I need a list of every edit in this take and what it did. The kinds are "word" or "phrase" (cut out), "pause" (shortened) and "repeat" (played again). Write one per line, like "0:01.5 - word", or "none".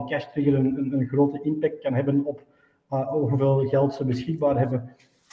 none